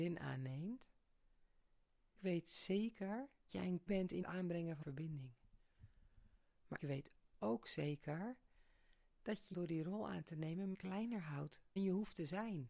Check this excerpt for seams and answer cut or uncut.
cut